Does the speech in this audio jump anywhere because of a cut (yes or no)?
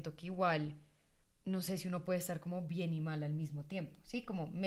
no